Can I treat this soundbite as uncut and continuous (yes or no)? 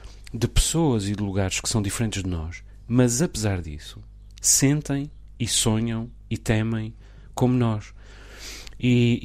yes